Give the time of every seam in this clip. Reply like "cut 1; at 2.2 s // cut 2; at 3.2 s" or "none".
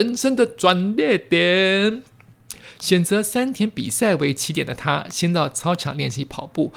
none